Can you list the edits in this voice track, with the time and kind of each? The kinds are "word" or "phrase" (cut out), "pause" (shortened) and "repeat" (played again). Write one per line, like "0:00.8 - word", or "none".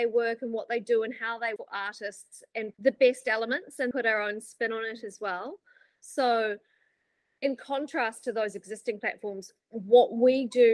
0:01.6 - word
0:02.7 - word
0:03.9 - word